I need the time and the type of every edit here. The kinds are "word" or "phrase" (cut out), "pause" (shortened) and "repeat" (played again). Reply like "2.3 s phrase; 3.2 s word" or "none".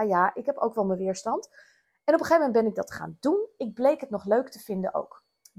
none